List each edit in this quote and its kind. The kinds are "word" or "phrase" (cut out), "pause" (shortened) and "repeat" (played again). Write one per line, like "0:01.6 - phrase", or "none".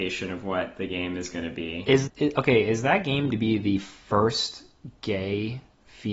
0:02.1 - word
0:03.3 - word